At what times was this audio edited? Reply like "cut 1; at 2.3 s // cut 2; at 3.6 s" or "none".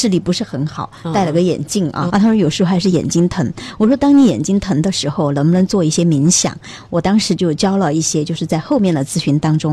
cut 1; at 2.1 s